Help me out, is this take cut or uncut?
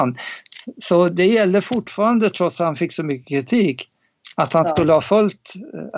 uncut